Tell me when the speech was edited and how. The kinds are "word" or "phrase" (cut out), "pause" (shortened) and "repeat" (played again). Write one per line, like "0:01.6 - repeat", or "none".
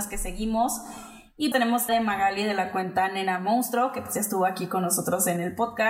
0:01.5 - word
0:01.9 - word